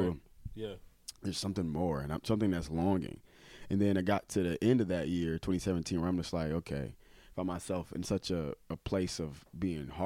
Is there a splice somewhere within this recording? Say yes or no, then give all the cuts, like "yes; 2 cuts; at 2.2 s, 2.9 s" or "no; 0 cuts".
no; 0 cuts